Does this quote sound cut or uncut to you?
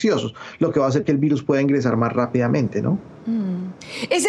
uncut